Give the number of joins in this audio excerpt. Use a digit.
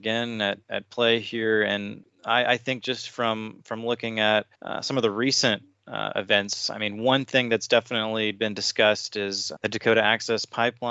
1